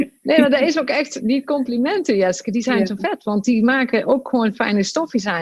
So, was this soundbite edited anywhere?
no; 0 cuts

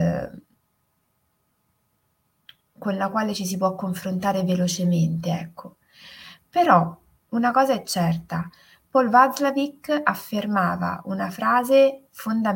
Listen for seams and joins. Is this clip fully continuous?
yes; 0 cuts

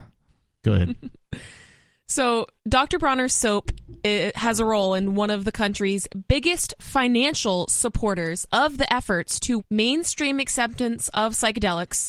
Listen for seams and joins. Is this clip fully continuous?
no; 2 cuts; at 2.6 s, 9.6 s

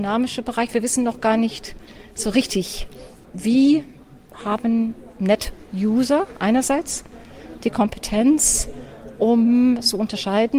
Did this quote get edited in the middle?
no; 0 cuts

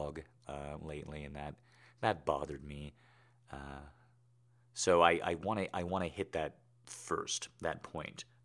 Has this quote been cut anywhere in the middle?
no; 0 cuts

